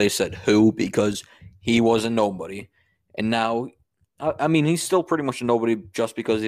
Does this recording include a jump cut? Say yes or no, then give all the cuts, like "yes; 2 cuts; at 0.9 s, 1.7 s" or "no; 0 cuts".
no; 0 cuts